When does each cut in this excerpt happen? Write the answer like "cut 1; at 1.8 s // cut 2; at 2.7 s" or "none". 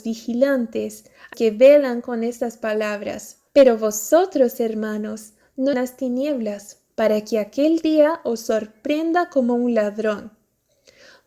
cut 1; at 1.3 s // cut 2; at 3.5 s // cut 3; at 5.7 s